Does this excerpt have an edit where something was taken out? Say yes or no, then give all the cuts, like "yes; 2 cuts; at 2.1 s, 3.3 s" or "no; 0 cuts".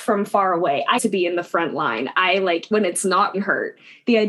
yes; 3 cuts; at 1.0 s, 2.7 s, 3.3 s